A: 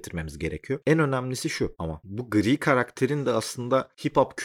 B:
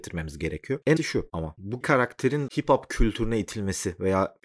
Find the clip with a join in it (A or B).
B